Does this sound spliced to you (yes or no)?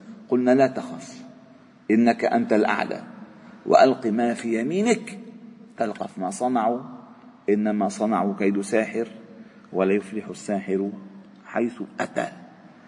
no